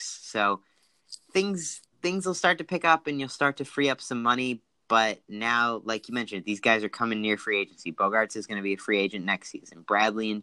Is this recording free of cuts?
no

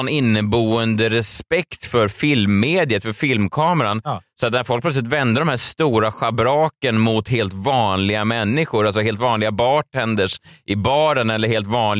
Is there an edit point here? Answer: no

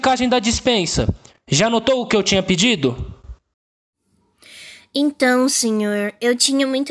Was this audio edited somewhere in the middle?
no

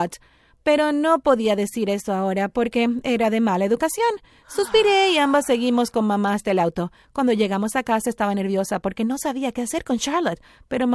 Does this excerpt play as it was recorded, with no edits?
yes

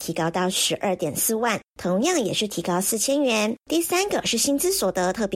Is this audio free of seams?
no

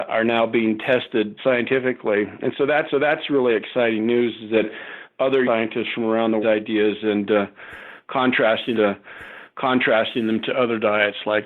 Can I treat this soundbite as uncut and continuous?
no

